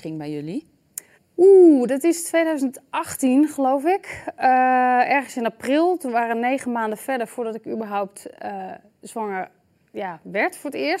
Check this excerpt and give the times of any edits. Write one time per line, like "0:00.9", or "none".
0:01.1